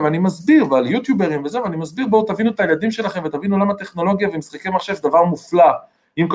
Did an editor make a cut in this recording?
no; 0 cuts

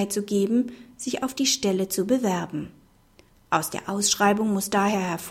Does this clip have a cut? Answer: no; 0 cuts

